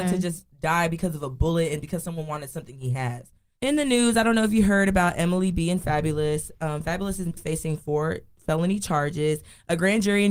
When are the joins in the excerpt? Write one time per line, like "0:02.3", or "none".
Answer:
0:07.4